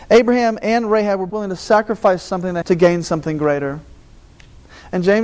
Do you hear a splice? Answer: yes; 2 cuts; at 1.3 s, 2.6 s

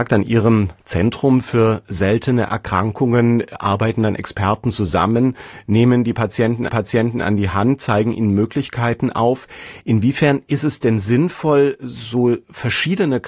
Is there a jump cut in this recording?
yes; 1 cut; at 6.7 s

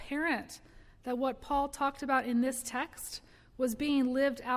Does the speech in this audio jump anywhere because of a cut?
no; 0 cuts

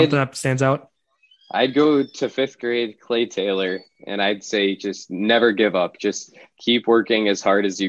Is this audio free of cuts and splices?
yes; 0 cuts

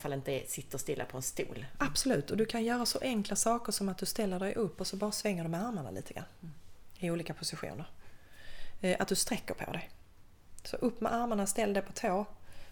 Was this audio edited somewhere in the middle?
no; 0 cuts

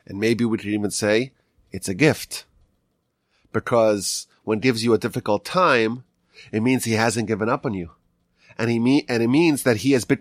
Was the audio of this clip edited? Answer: yes; 1 cut; at 4.6 s

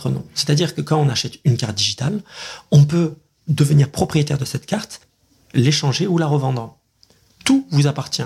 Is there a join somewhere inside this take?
no; 0 cuts

